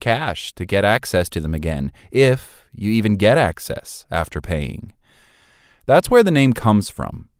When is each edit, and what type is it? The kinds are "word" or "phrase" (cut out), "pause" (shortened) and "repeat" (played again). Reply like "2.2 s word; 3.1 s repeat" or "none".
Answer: none

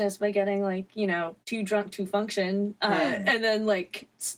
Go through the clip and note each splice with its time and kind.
1.4 s pause

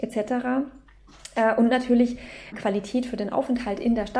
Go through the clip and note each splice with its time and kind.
2.5 s word

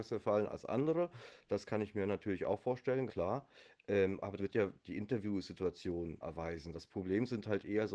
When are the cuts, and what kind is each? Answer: 3.1 s word; 4.4 s word; 6.2 s word

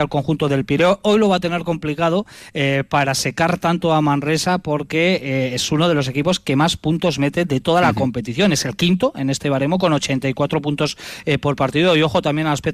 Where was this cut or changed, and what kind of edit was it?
none

